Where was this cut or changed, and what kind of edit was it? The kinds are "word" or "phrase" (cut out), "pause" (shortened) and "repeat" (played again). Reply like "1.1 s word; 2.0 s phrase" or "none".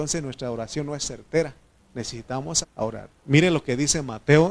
2.6 s word; 3.2 s pause